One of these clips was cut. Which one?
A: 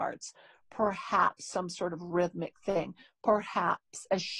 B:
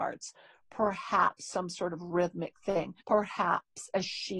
B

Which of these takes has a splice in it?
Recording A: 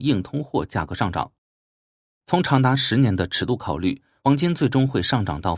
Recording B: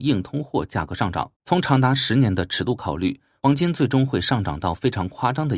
B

